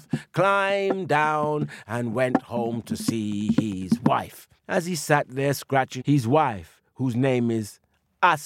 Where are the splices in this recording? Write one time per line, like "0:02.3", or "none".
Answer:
0:04.6
0:06.0